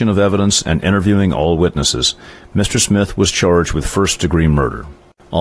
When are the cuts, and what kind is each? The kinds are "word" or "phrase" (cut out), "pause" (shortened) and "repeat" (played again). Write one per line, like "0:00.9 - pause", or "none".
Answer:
none